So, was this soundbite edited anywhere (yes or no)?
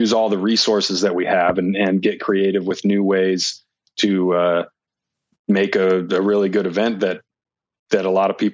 no